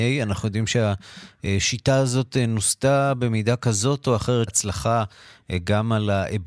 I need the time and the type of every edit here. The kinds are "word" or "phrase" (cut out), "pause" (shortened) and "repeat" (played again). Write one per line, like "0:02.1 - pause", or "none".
0:04.5 - word